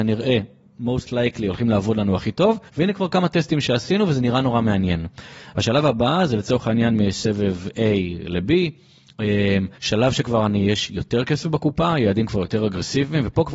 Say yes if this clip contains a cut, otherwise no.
yes